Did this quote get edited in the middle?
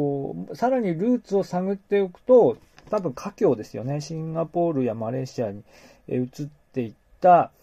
no; 0 cuts

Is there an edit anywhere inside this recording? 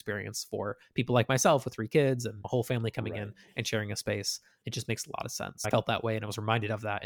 no; 0 cuts

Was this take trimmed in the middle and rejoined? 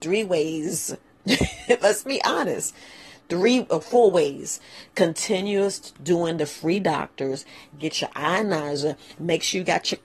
no; 0 cuts

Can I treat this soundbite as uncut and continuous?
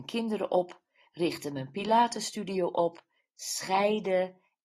yes; 0 cuts

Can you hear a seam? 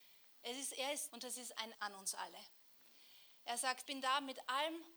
yes; 3 cuts; at 1.1 s, 1.7 s, 3.9 s

